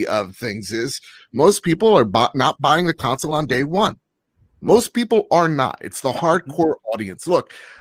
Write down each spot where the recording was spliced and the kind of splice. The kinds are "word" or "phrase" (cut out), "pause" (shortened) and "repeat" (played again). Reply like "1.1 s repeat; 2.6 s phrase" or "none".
none